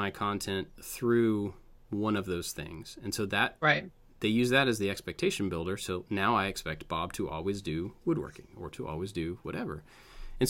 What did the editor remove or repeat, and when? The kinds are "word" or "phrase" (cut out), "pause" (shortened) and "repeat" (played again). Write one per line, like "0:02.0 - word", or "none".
none